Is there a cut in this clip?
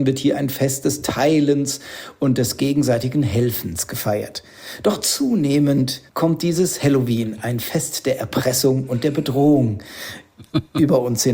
yes; 1 cut; at 6.1 s

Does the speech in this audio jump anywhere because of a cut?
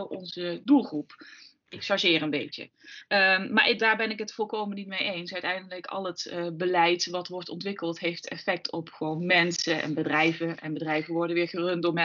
no; 0 cuts

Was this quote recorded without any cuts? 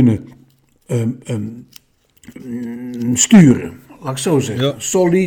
no; 1 cut; at 1.2 s

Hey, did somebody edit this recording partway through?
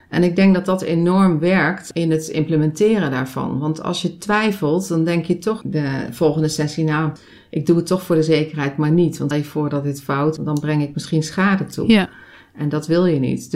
yes; 2 cuts; at 9.3 s, 10.4 s

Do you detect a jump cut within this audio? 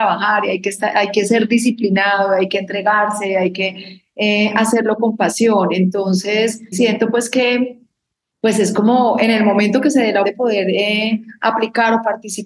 yes; 2 cuts; at 6.7 s, 10.2 s

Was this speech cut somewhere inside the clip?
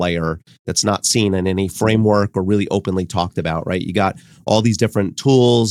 no; 0 cuts

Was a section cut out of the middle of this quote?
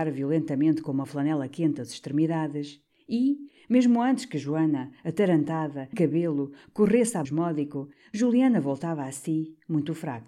yes; 2 cuts; at 5.9 s, 7.3 s

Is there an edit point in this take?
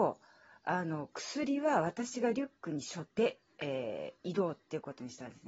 yes; 1 cut; at 3.1 s

